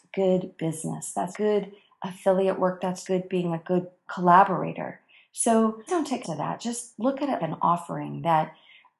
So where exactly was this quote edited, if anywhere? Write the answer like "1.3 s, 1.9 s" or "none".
1.3 s, 3.0 s, 4.1 s, 5.9 s, 6.2 s, 7.4 s